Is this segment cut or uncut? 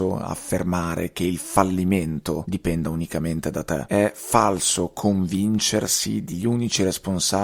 cut